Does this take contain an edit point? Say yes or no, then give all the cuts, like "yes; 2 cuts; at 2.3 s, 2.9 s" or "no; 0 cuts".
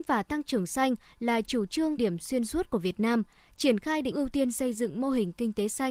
yes; 2 cuts; at 2.0 s, 4.1 s